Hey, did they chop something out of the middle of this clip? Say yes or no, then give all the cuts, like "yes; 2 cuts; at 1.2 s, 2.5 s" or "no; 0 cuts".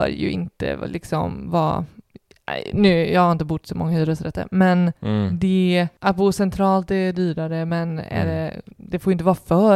yes; 2 cuts; at 5.0 s, 8.7 s